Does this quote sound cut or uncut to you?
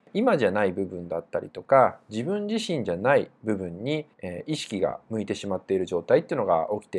cut